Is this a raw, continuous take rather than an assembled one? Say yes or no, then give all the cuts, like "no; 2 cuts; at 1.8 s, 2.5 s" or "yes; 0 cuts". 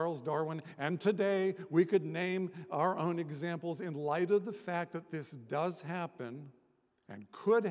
yes; 0 cuts